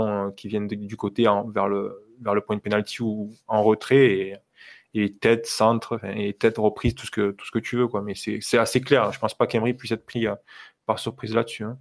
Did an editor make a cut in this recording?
no; 0 cuts

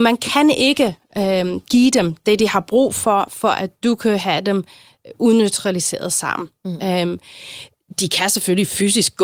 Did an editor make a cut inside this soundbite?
no; 0 cuts

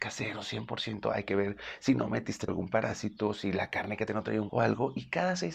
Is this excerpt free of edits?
no; 3 cuts; at 2.5 s, 4.1 s, 4.5 s

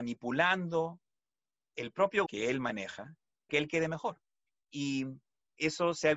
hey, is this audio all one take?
no; 2 cuts; at 2.3 s, 3.5 s

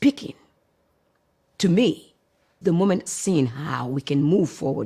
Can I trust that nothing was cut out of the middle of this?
no; 2 cuts; at 2.6 s, 3.1 s

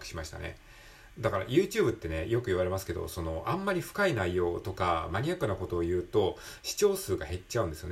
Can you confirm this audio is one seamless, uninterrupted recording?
yes; 0 cuts

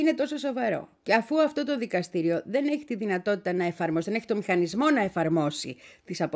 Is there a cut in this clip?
yes; 1 cut; at 1.0 s

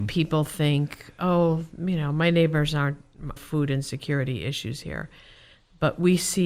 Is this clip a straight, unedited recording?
no; 1 cut; at 3.4 s

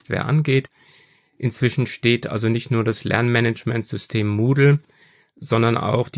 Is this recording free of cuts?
yes; 0 cuts

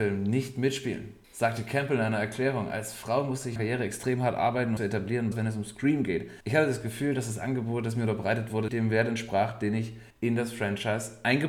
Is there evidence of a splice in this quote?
yes; 6 cuts; at 3.6 s, 4.8 s, 5.3 s, 6.4 s, 8.7 s, 10.1 s

